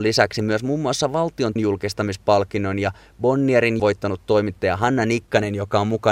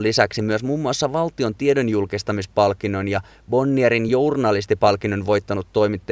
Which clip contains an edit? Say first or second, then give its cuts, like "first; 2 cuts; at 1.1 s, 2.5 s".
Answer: first; 2 cuts; at 1.6 s, 3.8 s